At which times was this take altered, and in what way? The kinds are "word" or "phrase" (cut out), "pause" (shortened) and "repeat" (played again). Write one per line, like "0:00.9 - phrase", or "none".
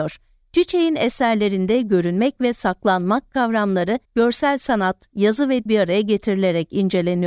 0:04.0 - pause
0:05.7 - word

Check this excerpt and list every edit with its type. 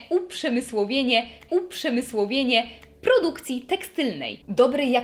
0:01.5 - repeat

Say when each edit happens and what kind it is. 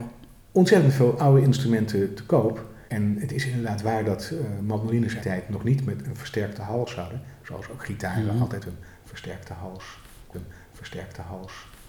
0:02.9 - pause
0:05.2 - phrase
0:10.3 - repeat

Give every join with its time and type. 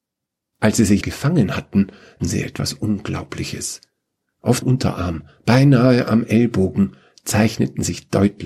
0:01.0 - word
0:02.2 - word
0:04.6 - word

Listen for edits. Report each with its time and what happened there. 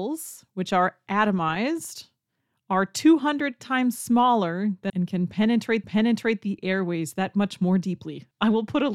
0:04.9 - phrase
0:05.8 - repeat

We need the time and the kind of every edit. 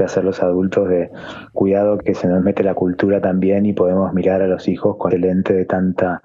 0:01.5 - word
0:02.0 - word
0:05.1 - word

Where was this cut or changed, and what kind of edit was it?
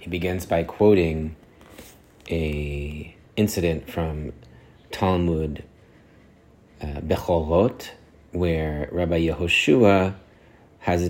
0:03.3 - pause
0:08.1 - pause

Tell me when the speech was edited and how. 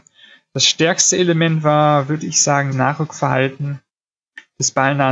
0:02.7 - word

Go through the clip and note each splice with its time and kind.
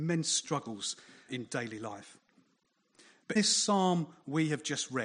0:01.3 - word
0:03.4 - word

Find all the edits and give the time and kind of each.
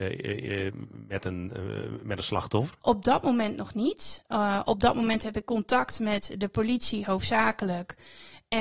0:02.8 - pause

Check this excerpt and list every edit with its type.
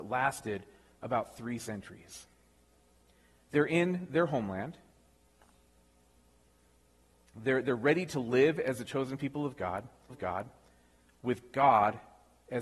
0:10.1 - repeat

